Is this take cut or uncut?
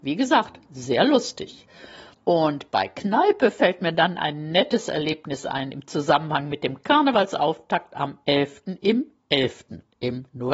uncut